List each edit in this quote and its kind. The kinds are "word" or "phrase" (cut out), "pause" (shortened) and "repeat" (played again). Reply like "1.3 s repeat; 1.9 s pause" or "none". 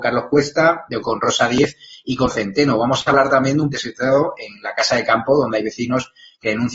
1.0 s word; 2.3 s word; 3.7 s word